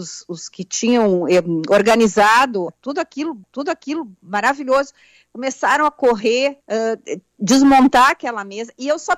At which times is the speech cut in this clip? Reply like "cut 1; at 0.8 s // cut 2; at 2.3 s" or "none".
cut 1; at 2.7 s // cut 2; at 3.4 s // cut 3; at 6.6 s